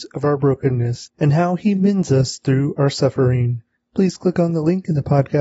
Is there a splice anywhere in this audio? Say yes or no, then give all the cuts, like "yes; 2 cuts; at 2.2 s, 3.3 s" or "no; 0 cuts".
no; 0 cuts